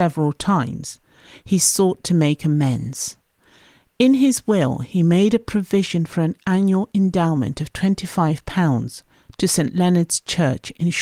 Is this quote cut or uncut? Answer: uncut